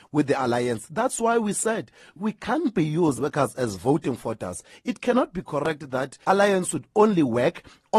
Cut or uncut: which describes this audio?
cut